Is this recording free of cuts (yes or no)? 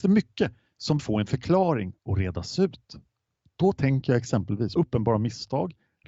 no